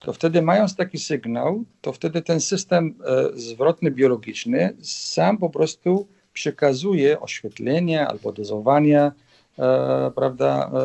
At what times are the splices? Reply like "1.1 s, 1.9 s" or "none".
none